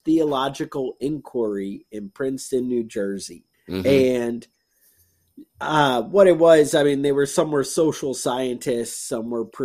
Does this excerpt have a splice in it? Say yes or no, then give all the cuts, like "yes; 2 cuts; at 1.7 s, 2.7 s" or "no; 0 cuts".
yes; 1 cut; at 3.5 s